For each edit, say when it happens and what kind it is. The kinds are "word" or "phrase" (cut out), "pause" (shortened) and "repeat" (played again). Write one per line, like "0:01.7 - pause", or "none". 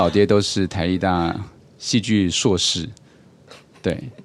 none